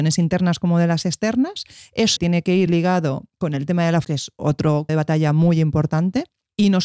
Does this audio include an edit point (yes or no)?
yes